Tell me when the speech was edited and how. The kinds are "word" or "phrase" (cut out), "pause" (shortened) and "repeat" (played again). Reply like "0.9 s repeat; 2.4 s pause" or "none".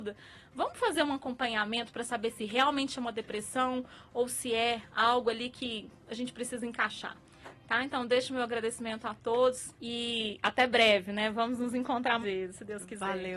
9.8 s pause; 12.2 s word